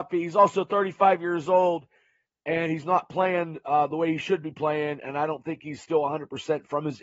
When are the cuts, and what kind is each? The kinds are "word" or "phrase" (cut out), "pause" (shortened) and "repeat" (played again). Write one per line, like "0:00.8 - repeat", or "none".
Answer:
none